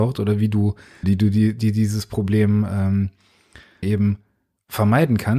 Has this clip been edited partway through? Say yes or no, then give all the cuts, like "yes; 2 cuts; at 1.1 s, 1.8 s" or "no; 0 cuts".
yes; 2 cuts; at 1.0 s, 3.8 s